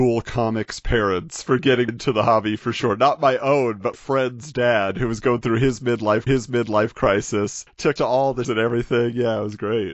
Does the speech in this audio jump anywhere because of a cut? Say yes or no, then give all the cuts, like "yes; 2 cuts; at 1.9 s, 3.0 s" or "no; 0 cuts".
yes; 5 cuts; at 1.9 s, 3.9 s, 6.3 s, 8.0 s, 8.4 s